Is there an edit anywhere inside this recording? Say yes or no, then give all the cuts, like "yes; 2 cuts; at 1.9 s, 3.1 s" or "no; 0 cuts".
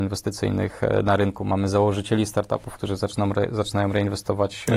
no; 0 cuts